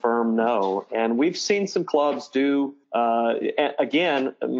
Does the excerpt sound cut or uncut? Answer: cut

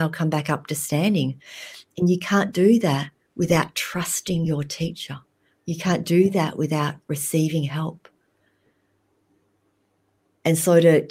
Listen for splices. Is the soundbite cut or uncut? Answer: uncut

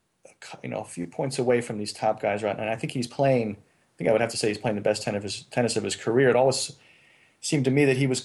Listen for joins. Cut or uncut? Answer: uncut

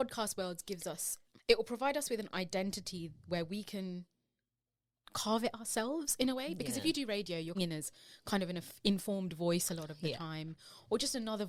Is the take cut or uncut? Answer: cut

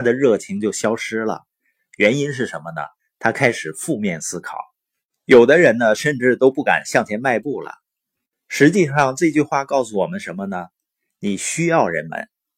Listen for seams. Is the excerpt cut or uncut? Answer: uncut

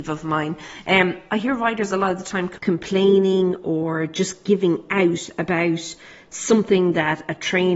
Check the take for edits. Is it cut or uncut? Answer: uncut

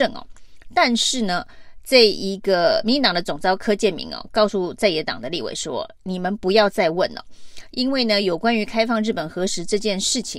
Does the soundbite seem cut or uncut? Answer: uncut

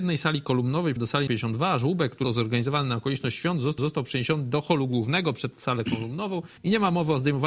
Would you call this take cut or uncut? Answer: cut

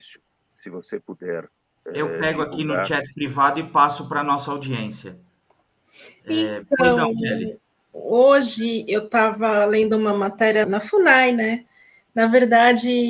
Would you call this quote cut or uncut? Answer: cut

